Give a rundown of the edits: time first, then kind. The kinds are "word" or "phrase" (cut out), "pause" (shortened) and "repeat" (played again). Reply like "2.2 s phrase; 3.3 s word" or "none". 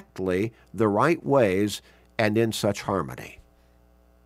none